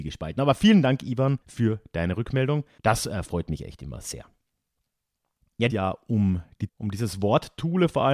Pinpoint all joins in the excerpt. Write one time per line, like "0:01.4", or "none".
0:01.4
0:05.7
0:06.7